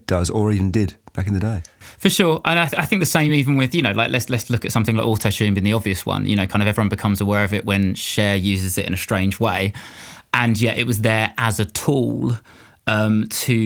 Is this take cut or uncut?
uncut